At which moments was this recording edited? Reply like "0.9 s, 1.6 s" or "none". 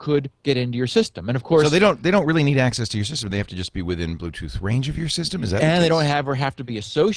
none